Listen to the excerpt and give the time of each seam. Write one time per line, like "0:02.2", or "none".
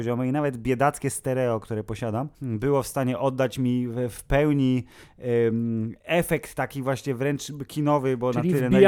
0:02.3
0:06.0